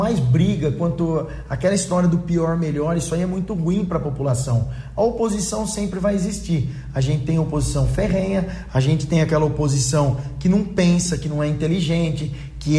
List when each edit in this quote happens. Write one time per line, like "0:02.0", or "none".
none